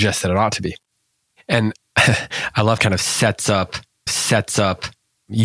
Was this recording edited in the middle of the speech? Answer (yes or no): yes